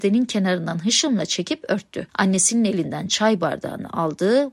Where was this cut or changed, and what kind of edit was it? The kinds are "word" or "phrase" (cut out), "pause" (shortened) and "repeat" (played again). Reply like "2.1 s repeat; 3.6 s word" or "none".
2.1 s pause

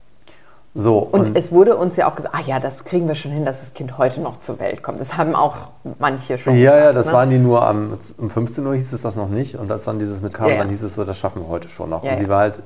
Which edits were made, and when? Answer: 10.3 s phrase

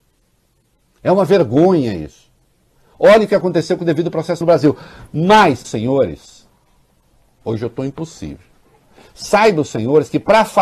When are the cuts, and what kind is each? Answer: 4.4 s word; 5.6 s word

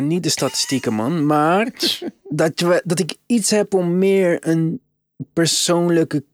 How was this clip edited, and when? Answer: none

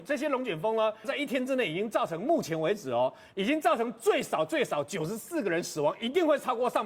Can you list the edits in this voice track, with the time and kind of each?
1.0 s phrase

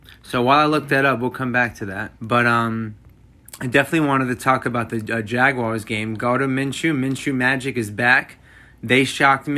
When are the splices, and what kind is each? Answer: 2.2 s pause

